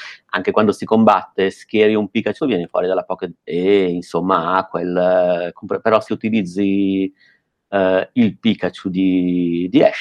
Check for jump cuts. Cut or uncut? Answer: cut